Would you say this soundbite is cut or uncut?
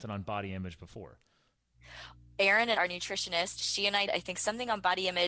cut